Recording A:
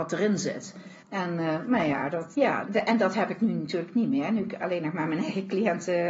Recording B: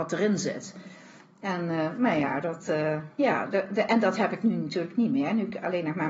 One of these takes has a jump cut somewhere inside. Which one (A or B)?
A